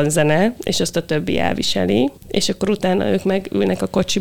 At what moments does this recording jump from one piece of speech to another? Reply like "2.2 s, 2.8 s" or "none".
2.2 s